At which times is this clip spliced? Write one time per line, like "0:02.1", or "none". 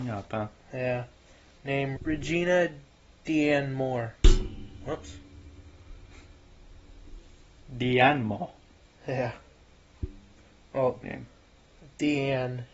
0:01.9
0:11.0

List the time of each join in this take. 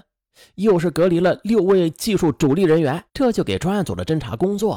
0:03.1

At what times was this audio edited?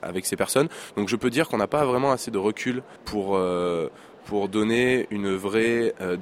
0:03.0

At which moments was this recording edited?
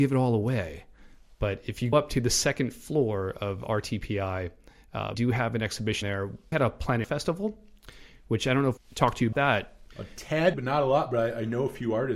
0:01.9
0:05.1
0:06.0
0:06.5
0:07.0
0:08.8
0:09.3
0:10.5

